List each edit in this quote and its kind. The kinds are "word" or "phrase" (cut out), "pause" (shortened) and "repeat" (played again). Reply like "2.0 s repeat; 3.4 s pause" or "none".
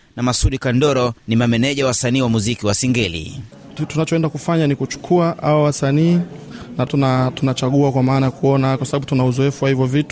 1.2 s pause; 6.9 s word